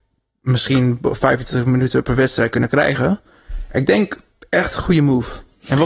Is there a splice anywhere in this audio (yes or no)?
no